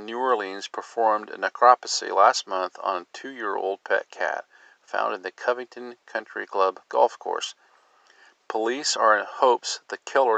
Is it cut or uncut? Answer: uncut